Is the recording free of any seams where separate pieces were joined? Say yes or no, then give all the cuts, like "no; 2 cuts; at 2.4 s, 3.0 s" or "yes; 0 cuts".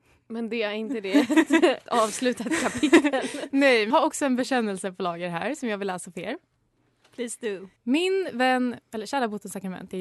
no; 3 cuts; at 1.9 s, 3.9 s, 7.8 s